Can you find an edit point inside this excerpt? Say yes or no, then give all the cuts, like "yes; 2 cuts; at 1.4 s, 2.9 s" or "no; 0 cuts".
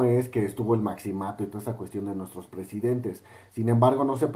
no; 0 cuts